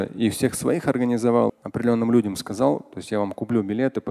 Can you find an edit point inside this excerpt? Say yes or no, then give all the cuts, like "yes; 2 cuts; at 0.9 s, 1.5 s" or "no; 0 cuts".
yes; 1 cut; at 1.5 s